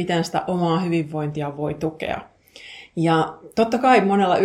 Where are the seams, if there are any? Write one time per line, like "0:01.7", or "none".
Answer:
none

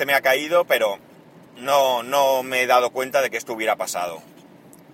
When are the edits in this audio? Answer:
0:01.5

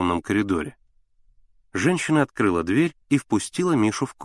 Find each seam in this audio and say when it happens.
0:03.0

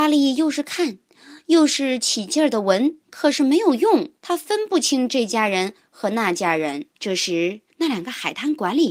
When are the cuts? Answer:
0:03.0
0:04.2
0:06.9
0:07.7

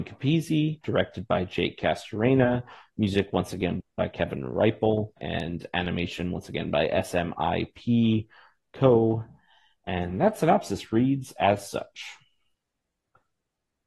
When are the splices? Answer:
0:05.2

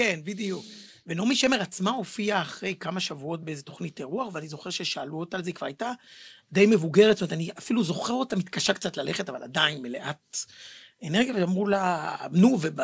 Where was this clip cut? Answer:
none

